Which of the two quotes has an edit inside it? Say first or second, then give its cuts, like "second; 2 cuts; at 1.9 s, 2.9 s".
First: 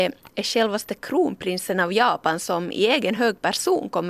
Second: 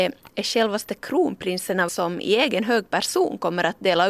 second; 1 cut; at 1.9 s